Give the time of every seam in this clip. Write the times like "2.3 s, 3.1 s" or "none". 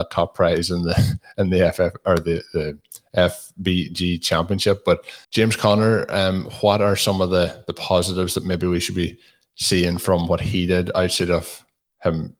5.2 s